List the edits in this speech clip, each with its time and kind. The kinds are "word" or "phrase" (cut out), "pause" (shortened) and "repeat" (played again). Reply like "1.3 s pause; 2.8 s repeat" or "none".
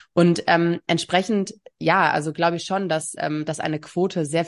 none